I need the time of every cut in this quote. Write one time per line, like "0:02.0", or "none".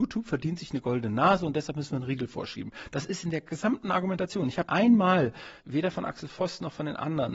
0:04.7
0:05.6